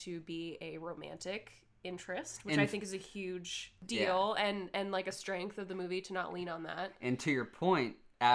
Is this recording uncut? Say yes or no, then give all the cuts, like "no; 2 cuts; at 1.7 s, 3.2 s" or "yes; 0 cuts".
yes; 0 cuts